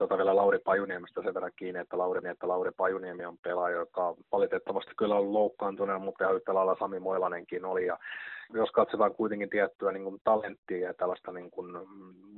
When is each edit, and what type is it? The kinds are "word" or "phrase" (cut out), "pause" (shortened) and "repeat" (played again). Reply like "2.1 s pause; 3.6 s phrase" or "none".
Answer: 2.2 s repeat; 4.2 s pause; 8.5 s word